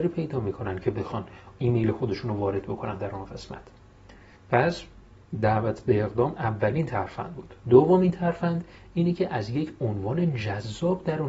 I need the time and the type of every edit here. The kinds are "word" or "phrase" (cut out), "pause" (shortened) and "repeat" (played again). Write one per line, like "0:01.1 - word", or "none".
0:04.4 - pause